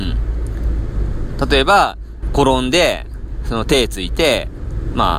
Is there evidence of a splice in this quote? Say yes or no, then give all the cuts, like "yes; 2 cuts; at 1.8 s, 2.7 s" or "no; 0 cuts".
yes; 1 cut; at 2.2 s